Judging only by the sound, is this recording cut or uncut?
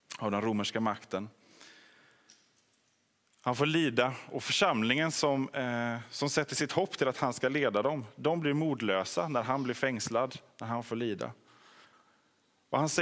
uncut